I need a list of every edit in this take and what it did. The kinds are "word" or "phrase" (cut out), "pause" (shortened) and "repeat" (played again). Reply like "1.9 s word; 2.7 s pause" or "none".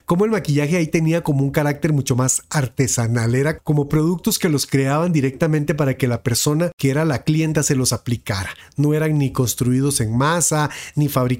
3.6 s word; 7.6 s word

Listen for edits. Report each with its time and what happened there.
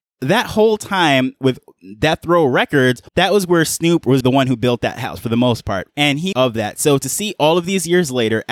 3.1 s pause; 4.2 s word; 6.3 s phrase

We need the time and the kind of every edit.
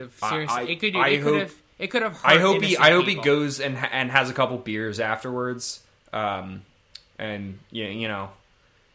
none

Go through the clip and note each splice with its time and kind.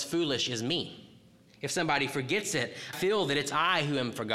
1.5 s pause; 2.9 s word

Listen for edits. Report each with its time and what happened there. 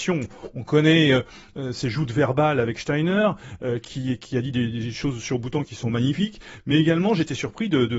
none

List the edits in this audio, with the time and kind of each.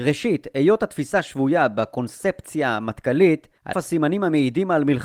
3.7 s word

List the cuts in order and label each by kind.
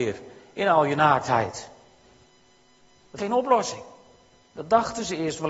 3.2 s word

